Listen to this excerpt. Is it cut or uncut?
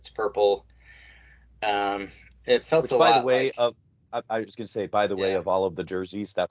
uncut